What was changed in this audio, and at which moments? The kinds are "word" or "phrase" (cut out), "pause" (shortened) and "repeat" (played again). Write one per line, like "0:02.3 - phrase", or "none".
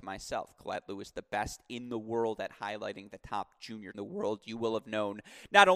0:03.9 - phrase